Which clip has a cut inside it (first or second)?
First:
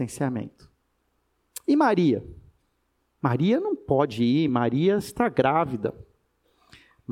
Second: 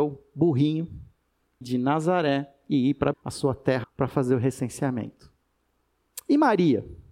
second